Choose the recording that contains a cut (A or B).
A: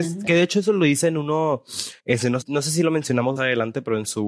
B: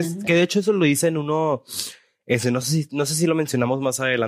A